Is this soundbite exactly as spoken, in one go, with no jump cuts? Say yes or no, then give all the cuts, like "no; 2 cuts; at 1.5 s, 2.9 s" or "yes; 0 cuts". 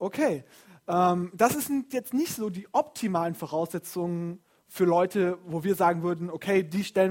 yes; 0 cuts